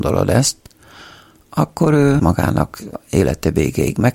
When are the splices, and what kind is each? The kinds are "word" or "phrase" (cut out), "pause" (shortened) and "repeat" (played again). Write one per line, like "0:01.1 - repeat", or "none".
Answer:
0:02.2 - word